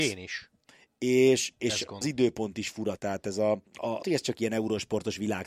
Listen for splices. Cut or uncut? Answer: cut